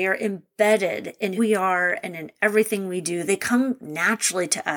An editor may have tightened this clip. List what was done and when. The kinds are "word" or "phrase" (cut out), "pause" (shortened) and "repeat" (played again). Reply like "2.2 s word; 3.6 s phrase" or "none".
1.4 s word